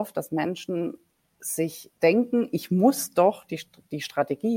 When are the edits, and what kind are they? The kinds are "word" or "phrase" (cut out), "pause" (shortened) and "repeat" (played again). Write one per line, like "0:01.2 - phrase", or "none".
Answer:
0:02.0 - pause